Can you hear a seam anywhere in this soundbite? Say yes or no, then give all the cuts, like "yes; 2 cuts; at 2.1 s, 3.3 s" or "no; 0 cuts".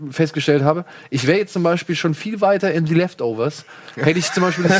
no; 0 cuts